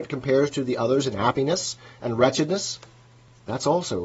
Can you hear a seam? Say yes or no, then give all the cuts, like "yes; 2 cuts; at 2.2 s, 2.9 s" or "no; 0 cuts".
no; 0 cuts